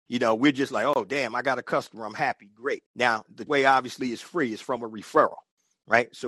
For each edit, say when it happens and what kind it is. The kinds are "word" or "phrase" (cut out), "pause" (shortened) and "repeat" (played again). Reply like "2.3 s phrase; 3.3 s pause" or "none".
2.9 s pause; 3.5 s word

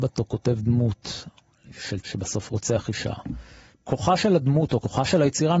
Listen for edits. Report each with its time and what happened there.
2.0 s word; 3.7 s word

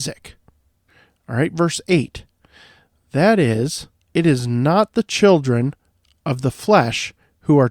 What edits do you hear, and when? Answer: 3.9 s pause

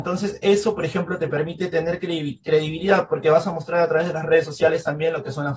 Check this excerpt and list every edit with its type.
none

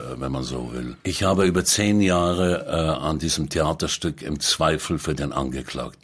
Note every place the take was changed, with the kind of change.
none

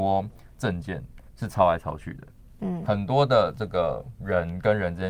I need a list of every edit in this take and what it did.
1.3 s pause

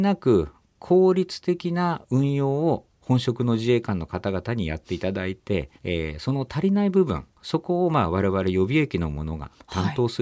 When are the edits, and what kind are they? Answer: 5.8 s pause; 7.3 s pause

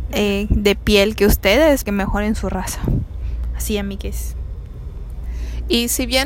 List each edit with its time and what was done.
1.8 s word

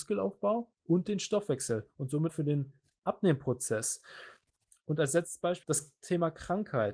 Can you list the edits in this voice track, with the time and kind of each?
2.3 s word; 5.6 s word

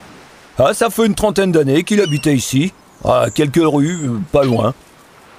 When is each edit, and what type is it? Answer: none

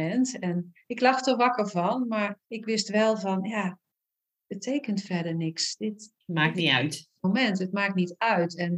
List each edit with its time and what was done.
2.4 s pause; 6.2 s pause; 7.2 s pause

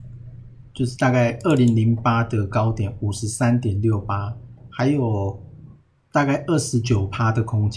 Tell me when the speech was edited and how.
5.9 s pause

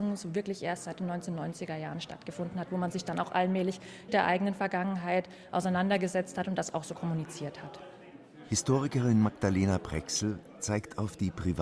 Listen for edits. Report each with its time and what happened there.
4.1 s phrase

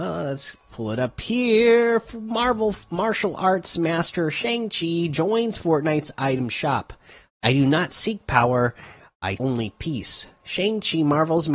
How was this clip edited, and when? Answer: 9.4 s word

